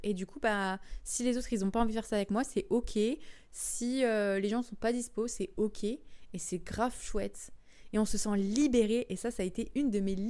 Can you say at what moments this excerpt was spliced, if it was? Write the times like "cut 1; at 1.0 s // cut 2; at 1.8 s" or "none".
none